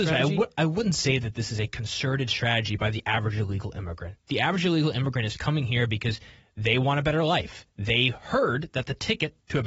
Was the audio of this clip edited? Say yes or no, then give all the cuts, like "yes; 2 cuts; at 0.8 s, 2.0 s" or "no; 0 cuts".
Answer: no; 0 cuts